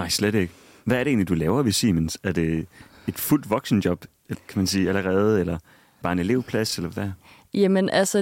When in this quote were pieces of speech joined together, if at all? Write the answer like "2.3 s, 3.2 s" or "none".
4.3 s, 6.0 s